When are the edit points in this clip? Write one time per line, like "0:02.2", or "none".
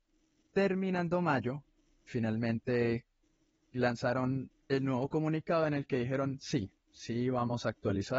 0:02.1
0:04.6